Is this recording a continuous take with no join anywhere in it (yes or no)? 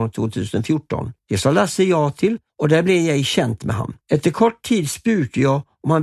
no